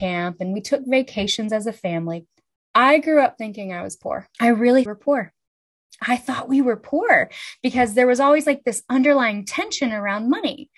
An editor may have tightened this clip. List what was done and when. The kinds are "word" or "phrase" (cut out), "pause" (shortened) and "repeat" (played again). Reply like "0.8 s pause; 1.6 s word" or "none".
4.3 s pause; 4.9 s phrase